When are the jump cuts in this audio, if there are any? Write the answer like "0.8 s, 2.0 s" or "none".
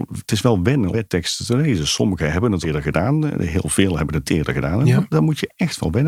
0.9 s, 2.6 s, 4.2 s